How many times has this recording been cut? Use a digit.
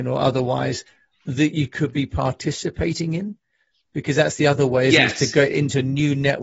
0